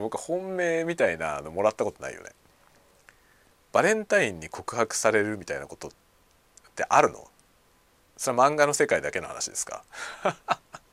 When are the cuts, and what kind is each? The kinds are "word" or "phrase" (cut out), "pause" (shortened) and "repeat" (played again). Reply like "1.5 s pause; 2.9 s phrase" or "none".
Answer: none